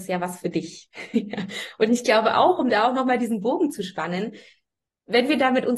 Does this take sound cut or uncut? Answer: uncut